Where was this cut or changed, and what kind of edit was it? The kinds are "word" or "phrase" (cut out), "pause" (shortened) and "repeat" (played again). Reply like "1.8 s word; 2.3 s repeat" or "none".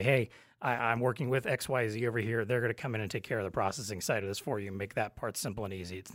none